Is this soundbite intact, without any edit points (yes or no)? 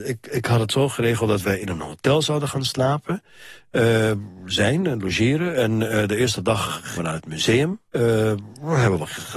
no